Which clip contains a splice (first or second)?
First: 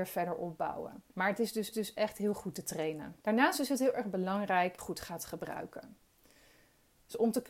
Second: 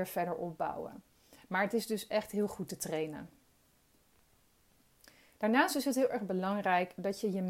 first